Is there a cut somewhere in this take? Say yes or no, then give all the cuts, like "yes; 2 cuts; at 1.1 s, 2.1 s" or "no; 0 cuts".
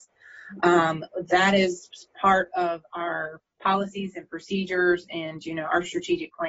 yes; 1 cut; at 3.5 s